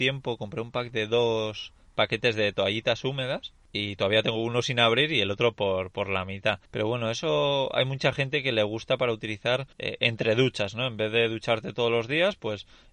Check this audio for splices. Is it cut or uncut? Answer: cut